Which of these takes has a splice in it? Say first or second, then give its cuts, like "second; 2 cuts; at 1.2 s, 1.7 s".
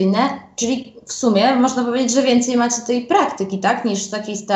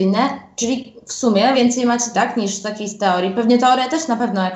second; 2 cuts; at 1.5 s, 2.1 s